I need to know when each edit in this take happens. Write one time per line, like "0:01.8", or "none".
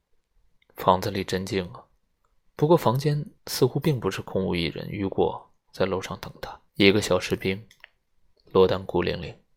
0:02.3
0:03.4
0:06.7